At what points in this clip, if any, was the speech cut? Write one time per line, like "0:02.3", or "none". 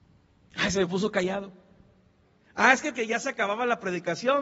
0:02.9